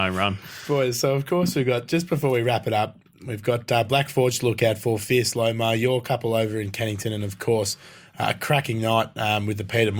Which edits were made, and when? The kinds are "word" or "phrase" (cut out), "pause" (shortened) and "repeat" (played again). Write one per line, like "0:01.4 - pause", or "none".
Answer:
none